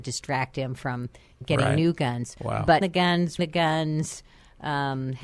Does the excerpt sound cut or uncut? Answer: cut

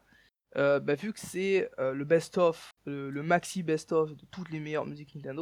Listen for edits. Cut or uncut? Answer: cut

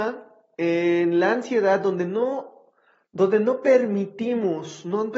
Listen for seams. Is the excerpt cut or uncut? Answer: uncut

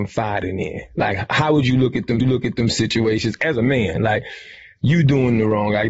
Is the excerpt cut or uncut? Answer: cut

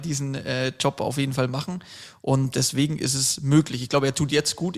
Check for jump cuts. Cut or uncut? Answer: uncut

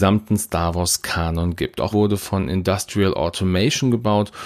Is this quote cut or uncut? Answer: cut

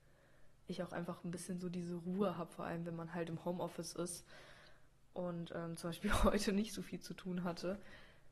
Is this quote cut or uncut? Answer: uncut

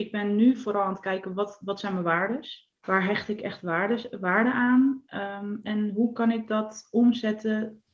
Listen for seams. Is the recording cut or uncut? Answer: cut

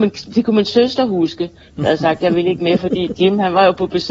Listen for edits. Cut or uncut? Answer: uncut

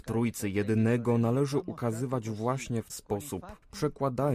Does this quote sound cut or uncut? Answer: cut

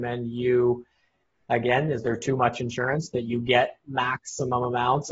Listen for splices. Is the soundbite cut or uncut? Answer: uncut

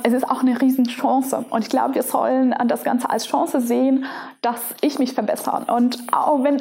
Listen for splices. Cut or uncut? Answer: uncut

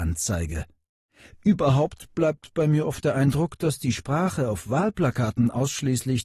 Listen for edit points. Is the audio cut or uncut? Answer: uncut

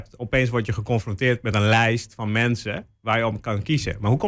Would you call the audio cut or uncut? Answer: uncut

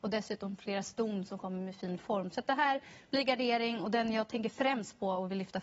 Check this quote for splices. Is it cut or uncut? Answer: uncut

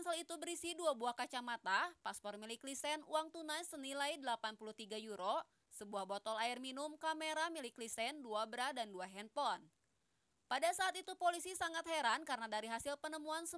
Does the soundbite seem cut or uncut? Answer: uncut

